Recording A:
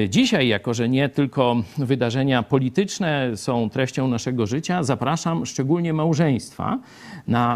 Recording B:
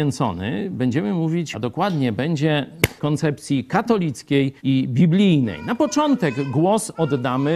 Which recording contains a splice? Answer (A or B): B